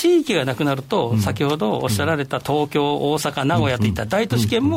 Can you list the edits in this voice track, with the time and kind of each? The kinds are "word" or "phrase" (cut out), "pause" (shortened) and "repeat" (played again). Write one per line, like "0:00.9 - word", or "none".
none